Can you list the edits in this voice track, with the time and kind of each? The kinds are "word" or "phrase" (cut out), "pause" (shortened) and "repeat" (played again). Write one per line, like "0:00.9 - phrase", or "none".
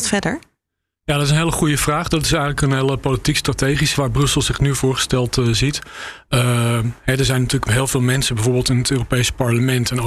0:03.9 - word